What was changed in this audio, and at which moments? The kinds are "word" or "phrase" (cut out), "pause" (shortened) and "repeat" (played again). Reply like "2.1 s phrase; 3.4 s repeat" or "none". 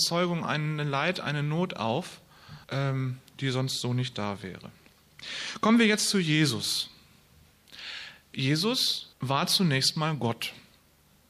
2.6 s pause; 9.1 s pause

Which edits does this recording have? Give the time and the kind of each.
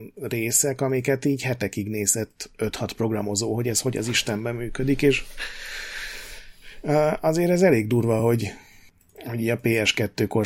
none

